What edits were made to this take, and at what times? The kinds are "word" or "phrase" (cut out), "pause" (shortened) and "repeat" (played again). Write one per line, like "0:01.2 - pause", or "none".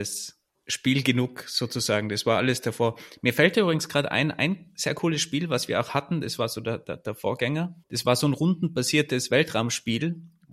0:07.8 - pause